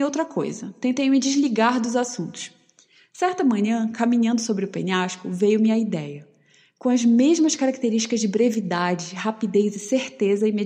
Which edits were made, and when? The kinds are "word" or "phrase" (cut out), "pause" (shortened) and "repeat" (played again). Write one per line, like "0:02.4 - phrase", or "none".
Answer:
none